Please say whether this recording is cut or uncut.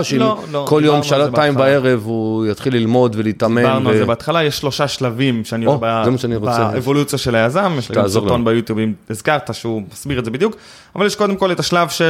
uncut